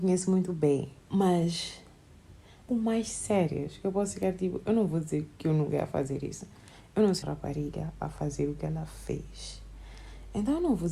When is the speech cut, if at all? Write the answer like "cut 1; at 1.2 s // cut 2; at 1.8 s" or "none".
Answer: cut 1; at 1.0 s // cut 2; at 2.7 s // cut 3; at 7.2 s